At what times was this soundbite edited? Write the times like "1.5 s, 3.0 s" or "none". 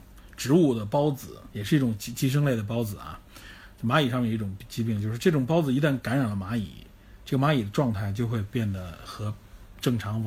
1.5 s